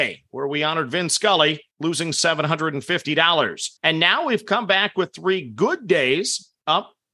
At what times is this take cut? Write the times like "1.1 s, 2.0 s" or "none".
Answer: 1.7 s, 3.8 s